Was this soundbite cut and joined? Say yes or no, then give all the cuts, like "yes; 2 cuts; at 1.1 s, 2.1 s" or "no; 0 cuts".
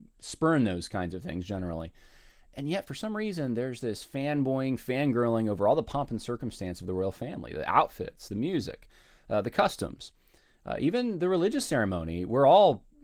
no; 0 cuts